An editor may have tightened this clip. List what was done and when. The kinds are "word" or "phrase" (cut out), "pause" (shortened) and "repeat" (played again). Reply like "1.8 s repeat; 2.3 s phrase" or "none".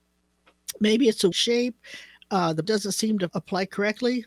1.3 s word; 2.6 s word; 3.3 s word